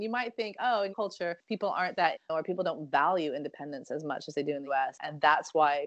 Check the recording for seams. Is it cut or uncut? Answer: cut